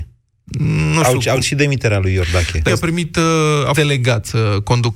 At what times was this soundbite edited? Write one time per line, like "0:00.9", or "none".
0:01.4
0:02.7
0:03.7